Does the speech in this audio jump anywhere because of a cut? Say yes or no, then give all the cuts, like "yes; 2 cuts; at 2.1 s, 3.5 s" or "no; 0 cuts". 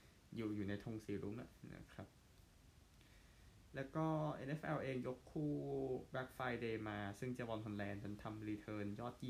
no; 0 cuts